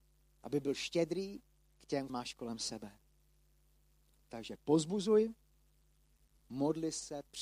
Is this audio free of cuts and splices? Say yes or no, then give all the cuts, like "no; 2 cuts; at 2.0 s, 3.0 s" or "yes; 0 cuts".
no; 1 cut; at 2.1 s